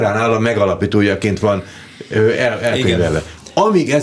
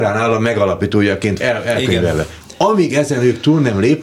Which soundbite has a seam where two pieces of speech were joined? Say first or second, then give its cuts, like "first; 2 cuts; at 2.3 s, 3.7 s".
second; 1 cut; at 1.4 s